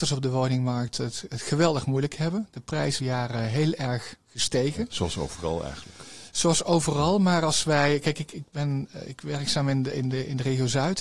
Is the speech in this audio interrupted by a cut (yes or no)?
yes